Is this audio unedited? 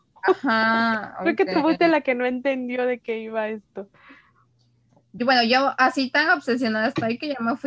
yes; 0 cuts

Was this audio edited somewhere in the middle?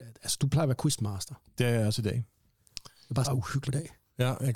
yes; 2 cuts; at 3.2 s, 3.6 s

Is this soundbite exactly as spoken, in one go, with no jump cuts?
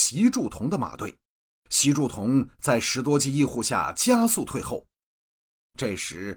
no; 1 cut; at 1.4 s

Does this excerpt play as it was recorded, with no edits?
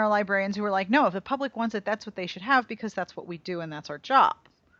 yes; 0 cuts

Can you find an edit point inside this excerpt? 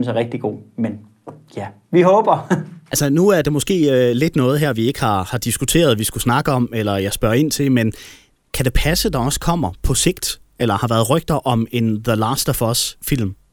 no; 0 cuts

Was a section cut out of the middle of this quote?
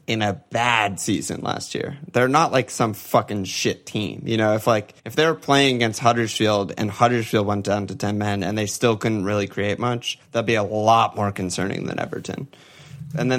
yes; 2 cuts; at 5.0 s, 10.2 s

